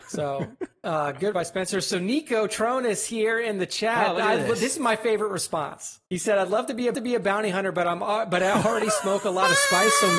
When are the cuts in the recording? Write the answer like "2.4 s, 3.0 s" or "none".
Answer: 1.3 s, 6.1 s, 6.9 s